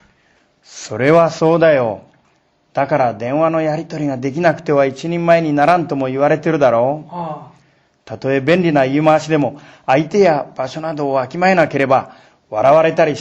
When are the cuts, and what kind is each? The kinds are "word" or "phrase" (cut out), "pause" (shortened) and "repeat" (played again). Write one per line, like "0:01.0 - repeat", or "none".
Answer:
none